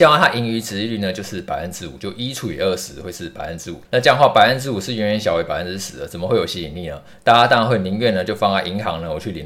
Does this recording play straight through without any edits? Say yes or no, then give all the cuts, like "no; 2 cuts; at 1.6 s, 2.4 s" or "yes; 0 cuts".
no; 1 cut; at 3.8 s